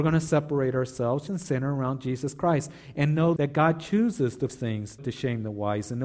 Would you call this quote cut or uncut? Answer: cut